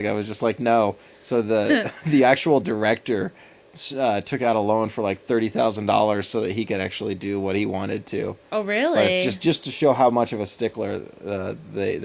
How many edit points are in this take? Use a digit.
0